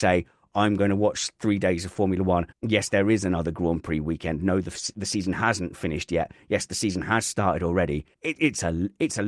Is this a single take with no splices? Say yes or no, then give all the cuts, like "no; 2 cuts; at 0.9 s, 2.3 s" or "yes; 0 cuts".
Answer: no; 2 cuts; at 2.5 s, 8.1 s